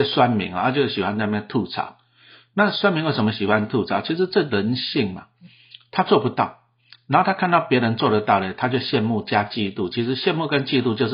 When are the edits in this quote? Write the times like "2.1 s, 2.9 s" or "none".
none